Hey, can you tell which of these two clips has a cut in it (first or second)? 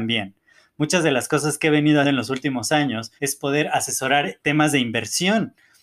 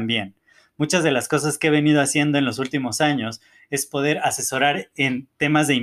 first